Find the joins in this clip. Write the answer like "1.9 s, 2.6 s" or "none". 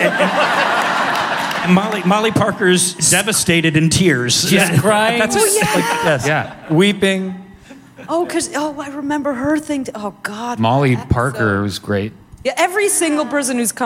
none